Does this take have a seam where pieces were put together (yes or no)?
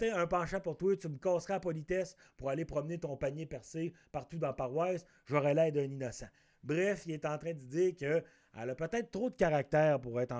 no